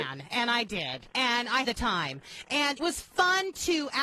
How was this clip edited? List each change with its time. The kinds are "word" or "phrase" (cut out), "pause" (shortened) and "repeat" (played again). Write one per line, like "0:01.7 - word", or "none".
0:01.6 - word
0:02.8 - word